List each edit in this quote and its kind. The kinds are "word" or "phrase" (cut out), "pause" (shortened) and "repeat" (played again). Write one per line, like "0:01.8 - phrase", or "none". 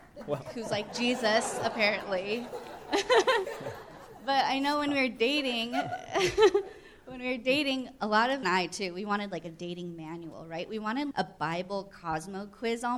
0:08.4 - phrase
0:11.1 - word